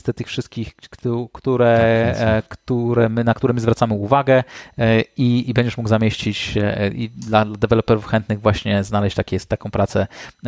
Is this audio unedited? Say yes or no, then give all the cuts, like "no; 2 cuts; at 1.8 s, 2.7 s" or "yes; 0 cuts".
yes; 0 cuts